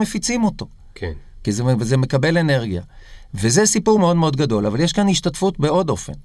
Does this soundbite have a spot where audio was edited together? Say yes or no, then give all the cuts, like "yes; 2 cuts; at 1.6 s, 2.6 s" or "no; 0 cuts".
no; 0 cuts